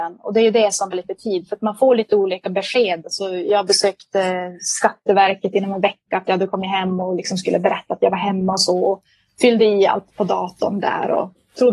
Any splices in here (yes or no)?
yes